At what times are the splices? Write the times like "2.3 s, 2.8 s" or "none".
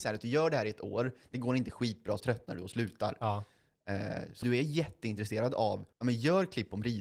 2.2 s, 4.4 s, 5.9 s